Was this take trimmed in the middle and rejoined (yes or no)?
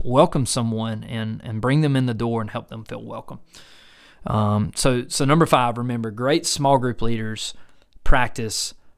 no